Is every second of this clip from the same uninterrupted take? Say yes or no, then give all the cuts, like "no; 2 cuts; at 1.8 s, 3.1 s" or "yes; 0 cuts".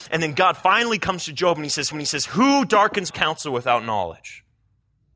no; 2 cuts; at 1.9 s, 3.1 s